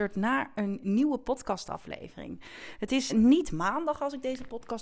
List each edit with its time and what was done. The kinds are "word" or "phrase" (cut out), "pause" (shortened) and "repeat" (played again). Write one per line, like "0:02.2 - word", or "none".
0:03.1 - word